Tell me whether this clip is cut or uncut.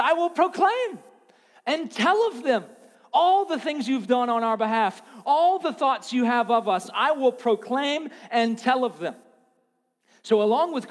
uncut